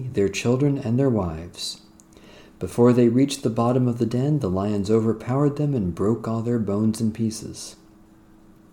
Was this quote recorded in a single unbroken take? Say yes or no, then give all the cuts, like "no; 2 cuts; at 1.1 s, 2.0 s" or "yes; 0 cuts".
yes; 0 cuts